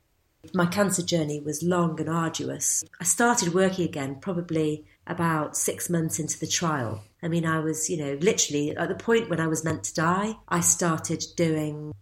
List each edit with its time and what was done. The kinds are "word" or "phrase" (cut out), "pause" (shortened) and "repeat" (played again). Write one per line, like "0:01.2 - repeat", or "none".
0:02.9 - pause
0:04.9 - pause
0:07.1 - pause
0:10.4 - pause

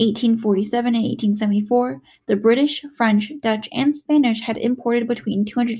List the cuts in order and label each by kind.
none

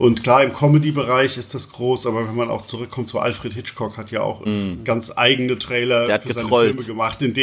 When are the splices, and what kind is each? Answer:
0:04.4 - word

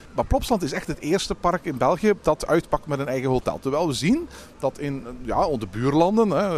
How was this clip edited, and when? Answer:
none

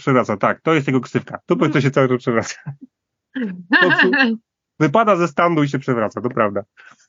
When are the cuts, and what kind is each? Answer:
none

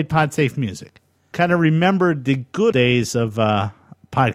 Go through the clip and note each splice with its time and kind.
0:01.3 - word
0:02.7 - word

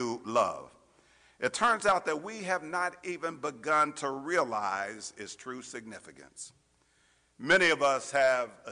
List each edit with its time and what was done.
none

